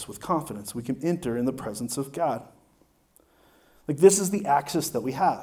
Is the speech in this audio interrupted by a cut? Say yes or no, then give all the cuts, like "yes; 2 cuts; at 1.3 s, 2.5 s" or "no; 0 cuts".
no; 0 cuts